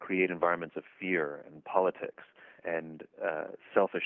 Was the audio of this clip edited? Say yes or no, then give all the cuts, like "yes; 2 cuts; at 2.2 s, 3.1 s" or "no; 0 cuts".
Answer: yes; 1 cut; at 2.6 s